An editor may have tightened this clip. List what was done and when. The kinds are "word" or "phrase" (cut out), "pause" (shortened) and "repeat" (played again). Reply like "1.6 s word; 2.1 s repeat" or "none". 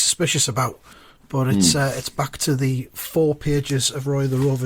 0.9 s pause